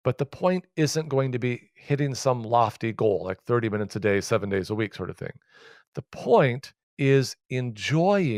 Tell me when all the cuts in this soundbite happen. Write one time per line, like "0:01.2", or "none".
none

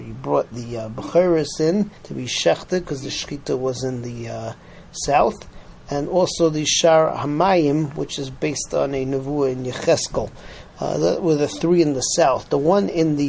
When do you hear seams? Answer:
0:02.0

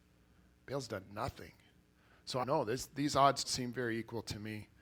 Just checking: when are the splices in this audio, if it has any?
0:02.4
0:03.4

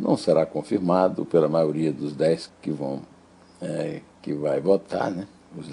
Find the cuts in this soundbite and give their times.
0:02.5

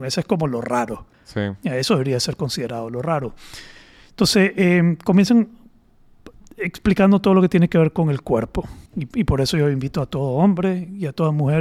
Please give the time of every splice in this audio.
0:01.1
0:08.9

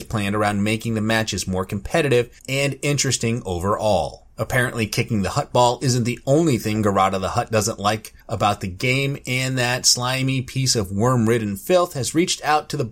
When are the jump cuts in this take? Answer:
0:02.4
0:04.3
0:08.2

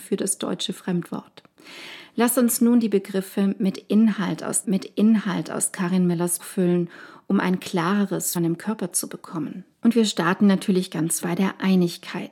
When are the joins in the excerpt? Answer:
0:04.6
0:06.4
0:08.4
0:09.7
0:11.2

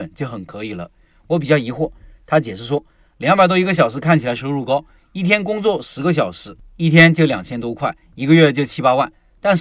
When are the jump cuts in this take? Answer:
none

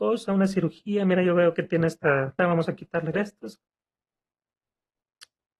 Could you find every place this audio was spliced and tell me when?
0:02.4
0:03.1

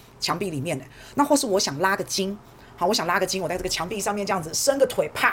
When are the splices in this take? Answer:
none

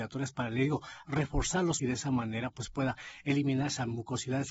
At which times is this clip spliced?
0:01.8

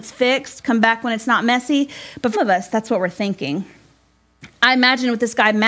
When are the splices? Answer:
0:02.3

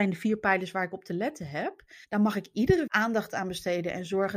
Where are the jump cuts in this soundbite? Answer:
0:02.0
0:02.9

